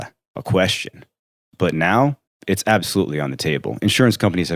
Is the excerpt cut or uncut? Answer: cut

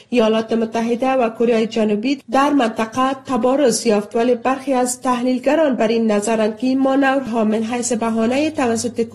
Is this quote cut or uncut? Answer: uncut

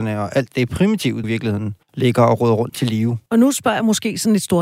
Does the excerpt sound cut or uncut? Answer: cut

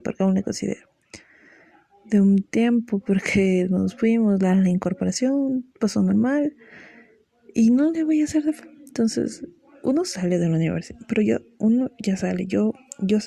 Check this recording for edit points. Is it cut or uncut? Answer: uncut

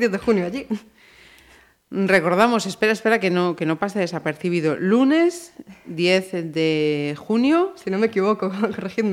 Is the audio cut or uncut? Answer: uncut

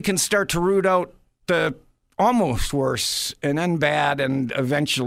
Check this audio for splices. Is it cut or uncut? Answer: uncut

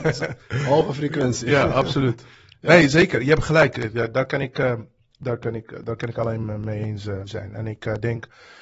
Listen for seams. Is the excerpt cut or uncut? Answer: cut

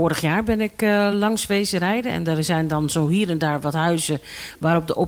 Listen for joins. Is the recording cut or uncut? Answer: uncut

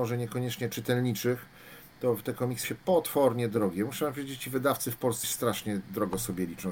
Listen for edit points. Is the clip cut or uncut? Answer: cut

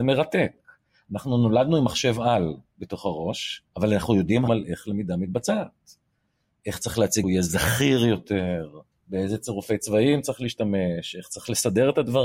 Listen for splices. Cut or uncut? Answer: cut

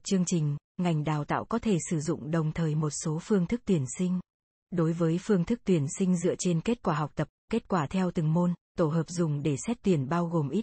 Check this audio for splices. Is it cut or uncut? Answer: cut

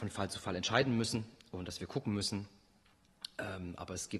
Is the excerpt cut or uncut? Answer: uncut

